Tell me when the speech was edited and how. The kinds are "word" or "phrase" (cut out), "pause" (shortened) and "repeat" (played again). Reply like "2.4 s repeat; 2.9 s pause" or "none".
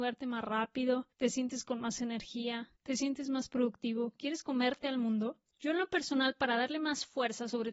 1.1 s pause; 2.8 s pause; 5.5 s pause